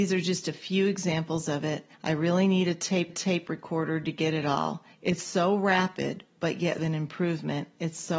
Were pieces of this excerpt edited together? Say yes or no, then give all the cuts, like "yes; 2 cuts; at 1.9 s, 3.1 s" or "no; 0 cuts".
yes; 4 cuts; at 1.9 s, 3.1 s, 4.9 s, 6.8 s